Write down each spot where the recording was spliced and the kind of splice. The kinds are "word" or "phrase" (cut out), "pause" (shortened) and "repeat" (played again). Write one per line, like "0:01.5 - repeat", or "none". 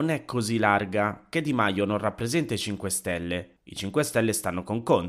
0:01.3 - word
0:03.6 - pause